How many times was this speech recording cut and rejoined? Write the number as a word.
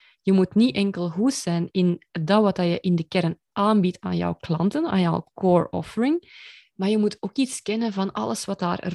zero